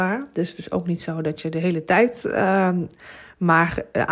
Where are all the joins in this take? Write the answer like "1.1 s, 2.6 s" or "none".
none